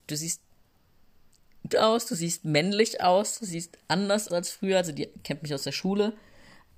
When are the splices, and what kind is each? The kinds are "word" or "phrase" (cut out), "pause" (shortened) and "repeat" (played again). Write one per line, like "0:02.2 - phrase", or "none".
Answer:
0:01.7 - word
0:04.3 - word

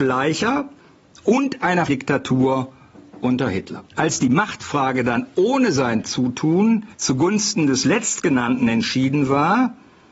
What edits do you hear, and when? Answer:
0:01.9 - word
0:03.9 - pause
0:06.9 - pause

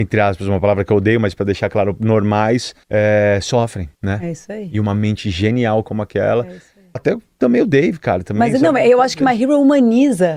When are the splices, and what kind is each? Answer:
0:02.8 - pause
0:03.9 - pause
0:07.0 - word

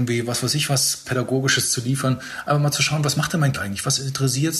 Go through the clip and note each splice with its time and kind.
0:01.0 - word
0:03.5 - word

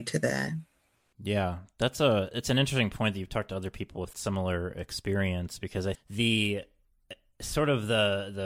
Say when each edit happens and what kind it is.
0:04.1 - word
0:05.9 - word

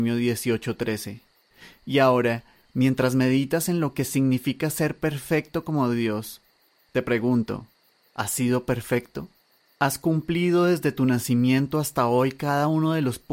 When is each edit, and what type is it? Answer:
none

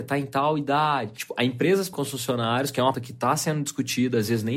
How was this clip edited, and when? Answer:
0:01.9 - word
0:02.9 - word

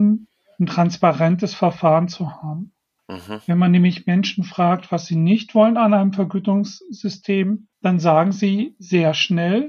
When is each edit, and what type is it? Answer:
0:03.0 - pause
0:07.7 - pause

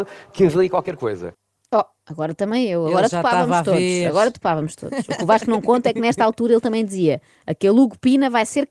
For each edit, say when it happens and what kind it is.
none

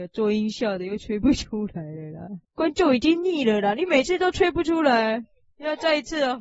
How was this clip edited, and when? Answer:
0:02.4 - pause

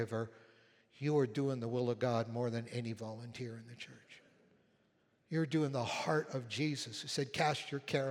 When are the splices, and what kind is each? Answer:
none

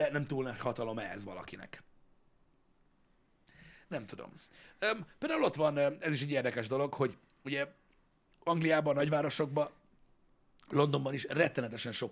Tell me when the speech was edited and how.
none

